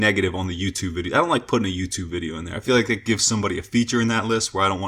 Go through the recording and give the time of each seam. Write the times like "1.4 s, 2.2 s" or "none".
none